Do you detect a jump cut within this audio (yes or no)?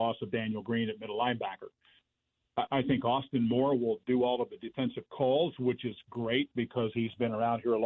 no